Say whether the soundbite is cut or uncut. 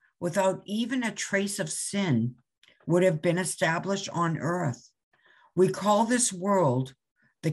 uncut